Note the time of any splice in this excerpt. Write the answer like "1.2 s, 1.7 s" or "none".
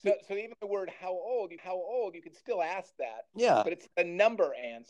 1.6 s, 3.9 s